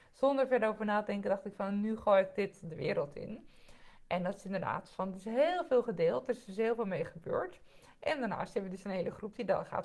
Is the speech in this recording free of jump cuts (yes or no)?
yes